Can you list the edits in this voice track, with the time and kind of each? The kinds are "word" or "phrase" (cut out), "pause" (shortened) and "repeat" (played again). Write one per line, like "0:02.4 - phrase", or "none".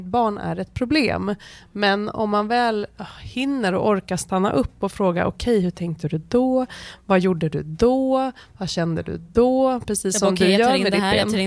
none